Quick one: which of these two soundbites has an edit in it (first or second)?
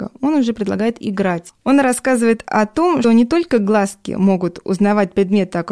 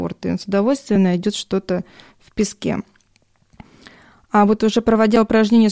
first